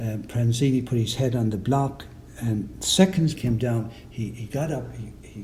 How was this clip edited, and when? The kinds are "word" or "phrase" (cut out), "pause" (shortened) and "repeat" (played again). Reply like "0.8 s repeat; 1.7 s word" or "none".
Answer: 3.4 s phrase

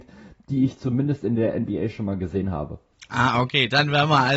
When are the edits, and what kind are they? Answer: none

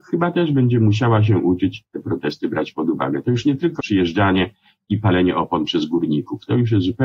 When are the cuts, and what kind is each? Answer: 1.9 s word; 3.8 s word

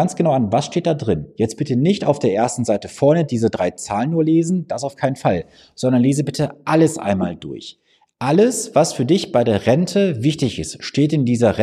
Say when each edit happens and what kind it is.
none

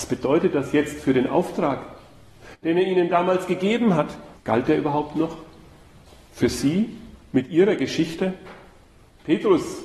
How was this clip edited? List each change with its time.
4.4 s pause

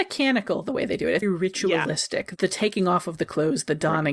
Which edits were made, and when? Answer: 1.2 s word

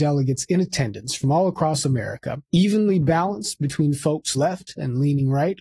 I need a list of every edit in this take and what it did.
2.4 s pause; 4.3 s word

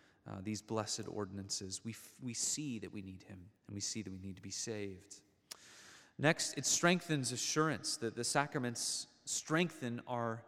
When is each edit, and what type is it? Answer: 3.6 s pause

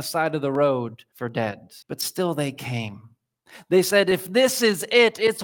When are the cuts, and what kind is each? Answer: 1.1 s pause; 1.8 s pause

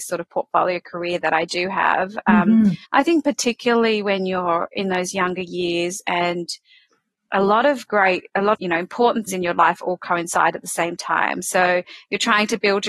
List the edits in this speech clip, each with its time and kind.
2.9 s pause; 8.5 s word; 9.3 s word

